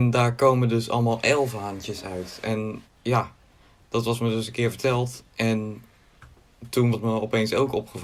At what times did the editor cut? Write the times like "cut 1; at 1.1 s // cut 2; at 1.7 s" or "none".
cut 1; at 2.8 s // cut 2; at 6.9 s